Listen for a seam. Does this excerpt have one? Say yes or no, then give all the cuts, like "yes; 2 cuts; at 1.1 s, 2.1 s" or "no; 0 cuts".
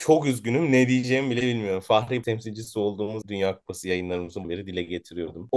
yes; 3 cuts; at 2.2 s, 3.2 s, 4.4 s